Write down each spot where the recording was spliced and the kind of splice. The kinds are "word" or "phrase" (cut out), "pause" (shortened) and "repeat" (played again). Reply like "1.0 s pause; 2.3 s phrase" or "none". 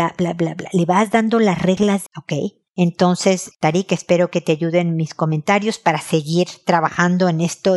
2.1 s phrase; 3.5 s word

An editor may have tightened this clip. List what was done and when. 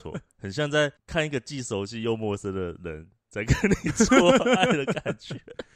1.0 s pause

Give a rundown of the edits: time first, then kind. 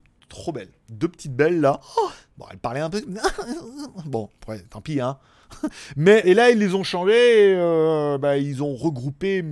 6.2 s word

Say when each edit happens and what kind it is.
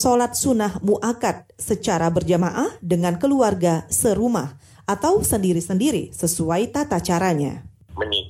none

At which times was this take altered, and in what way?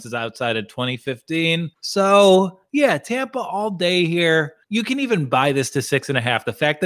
1.7 s pause; 4.6 s pause

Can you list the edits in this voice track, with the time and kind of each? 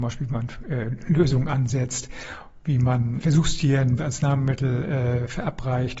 3.2 s word; 4.0 s word

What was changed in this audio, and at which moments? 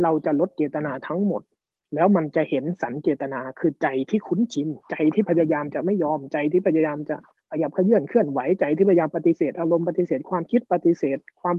1.7 s pause; 4.8 s pause; 7.4 s pause

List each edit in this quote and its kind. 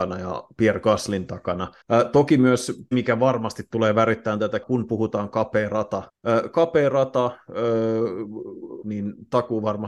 1.8 s pause; 2.9 s word; 4.6 s word; 6.1 s pause; 8.8 s phrase

